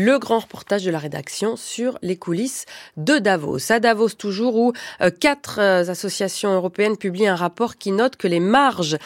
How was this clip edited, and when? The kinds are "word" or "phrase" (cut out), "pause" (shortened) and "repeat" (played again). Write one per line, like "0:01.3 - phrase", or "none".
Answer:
none